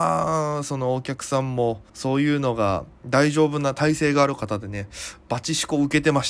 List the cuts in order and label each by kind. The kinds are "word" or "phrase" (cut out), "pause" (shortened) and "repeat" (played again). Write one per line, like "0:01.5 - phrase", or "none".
0:01.9 - pause
0:02.9 - pause